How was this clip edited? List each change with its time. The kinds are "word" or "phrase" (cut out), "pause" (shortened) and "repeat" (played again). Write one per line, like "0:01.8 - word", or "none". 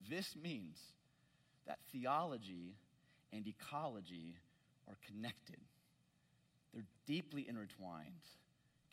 none